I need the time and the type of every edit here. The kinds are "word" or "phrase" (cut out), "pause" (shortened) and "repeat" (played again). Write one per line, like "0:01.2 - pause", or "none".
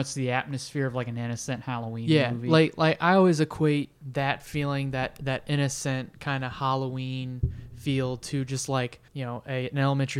0:09.1 - pause